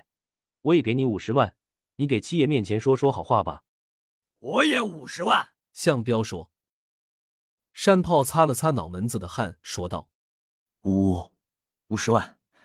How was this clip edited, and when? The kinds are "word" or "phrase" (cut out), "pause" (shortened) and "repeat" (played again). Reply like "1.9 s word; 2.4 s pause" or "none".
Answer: 3.7 s pause; 5.6 s pause; 10.1 s pause